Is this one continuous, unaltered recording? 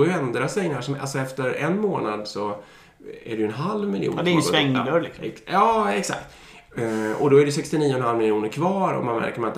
yes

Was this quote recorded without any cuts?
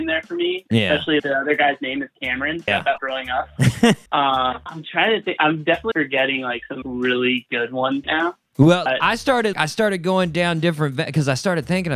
no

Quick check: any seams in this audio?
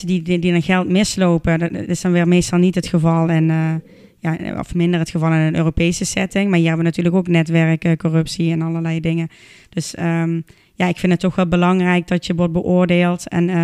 no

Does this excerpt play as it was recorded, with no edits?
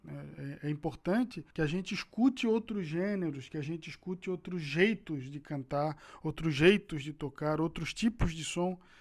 no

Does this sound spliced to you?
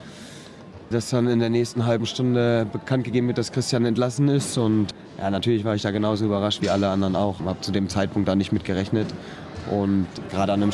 no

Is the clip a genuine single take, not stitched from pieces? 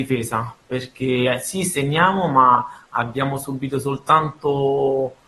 yes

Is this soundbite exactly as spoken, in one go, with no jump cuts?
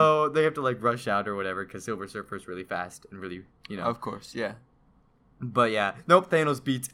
yes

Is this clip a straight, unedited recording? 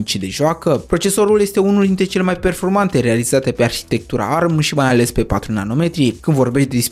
yes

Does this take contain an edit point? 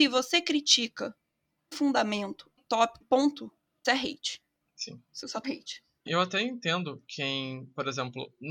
yes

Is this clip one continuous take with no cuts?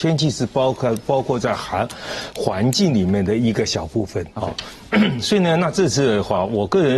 no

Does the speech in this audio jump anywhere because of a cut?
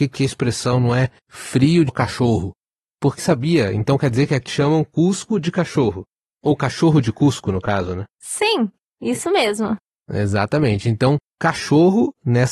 yes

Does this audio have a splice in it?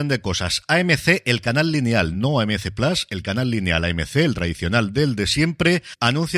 no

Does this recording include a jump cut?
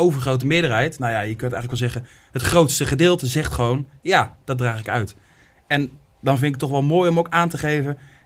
no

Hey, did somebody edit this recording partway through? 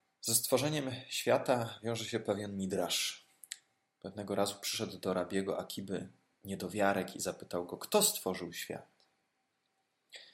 no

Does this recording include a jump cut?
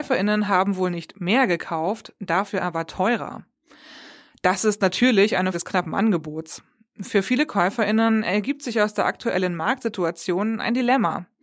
yes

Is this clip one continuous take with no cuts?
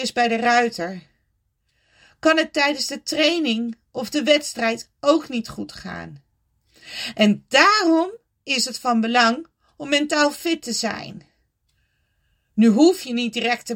yes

